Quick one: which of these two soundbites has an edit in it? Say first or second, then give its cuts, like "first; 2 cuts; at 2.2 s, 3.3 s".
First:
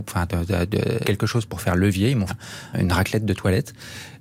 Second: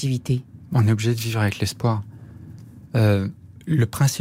first; 3 cuts; at 1.0 s, 2.3 s, 2.7 s